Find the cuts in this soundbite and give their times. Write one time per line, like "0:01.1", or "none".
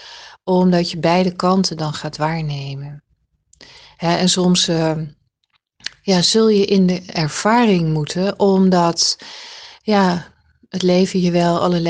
none